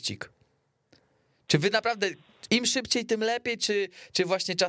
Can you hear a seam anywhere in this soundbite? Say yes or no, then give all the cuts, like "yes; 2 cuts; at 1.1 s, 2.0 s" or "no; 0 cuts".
no; 0 cuts